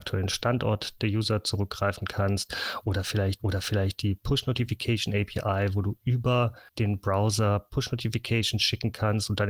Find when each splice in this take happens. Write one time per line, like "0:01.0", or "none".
0:03.4
0:06.7